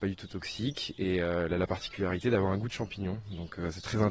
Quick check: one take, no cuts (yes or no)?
yes